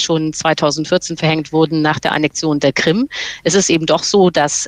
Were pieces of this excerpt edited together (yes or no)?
no